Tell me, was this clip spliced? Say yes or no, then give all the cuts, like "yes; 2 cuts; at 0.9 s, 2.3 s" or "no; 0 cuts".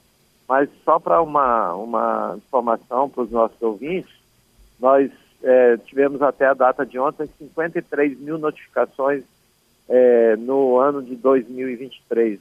no; 0 cuts